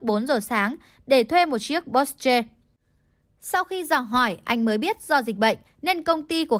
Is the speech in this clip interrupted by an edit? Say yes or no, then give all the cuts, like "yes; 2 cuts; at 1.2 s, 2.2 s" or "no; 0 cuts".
no; 0 cuts